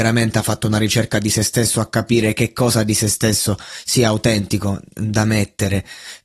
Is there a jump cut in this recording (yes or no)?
no